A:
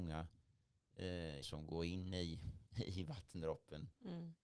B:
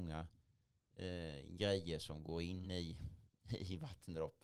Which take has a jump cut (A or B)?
A